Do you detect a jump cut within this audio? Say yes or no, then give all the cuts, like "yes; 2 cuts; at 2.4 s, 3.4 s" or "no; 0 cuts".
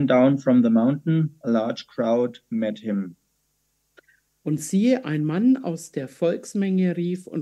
no; 0 cuts